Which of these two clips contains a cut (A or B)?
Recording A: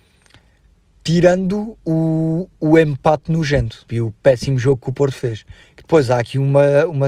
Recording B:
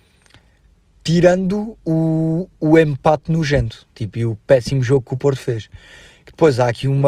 A